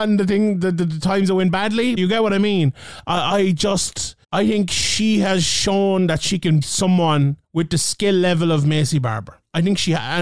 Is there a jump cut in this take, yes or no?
yes